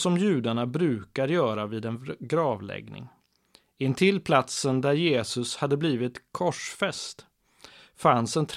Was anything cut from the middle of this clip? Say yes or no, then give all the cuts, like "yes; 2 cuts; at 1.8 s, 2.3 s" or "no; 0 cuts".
no; 0 cuts